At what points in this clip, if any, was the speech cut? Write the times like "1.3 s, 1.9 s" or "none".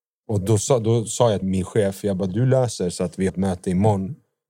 1.4 s, 3.3 s

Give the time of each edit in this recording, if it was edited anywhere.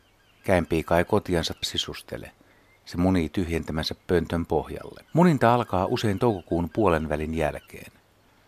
1.6 s, 5.1 s

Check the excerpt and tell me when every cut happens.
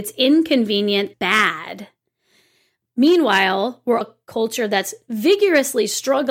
1.1 s, 4.0 s

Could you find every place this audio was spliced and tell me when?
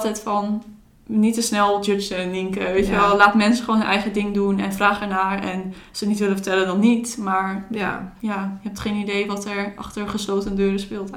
none

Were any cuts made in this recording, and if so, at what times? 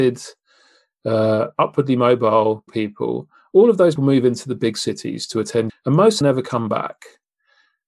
2.7 s, 4.0 s, 5.7 s, 6.2 s

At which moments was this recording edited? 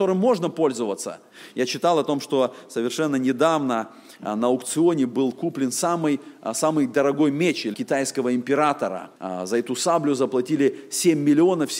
7.7 s, 9.2 s

